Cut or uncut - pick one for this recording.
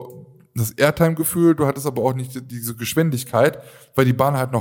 uncut